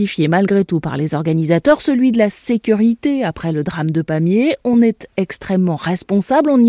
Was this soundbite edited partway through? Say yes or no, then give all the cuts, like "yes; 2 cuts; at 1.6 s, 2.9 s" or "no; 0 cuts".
no; 0 cuts